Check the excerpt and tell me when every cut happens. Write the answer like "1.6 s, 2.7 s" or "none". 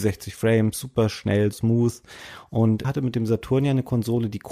1.5 s, 2.8 s